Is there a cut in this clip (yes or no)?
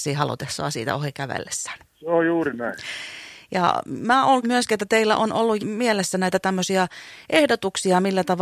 yes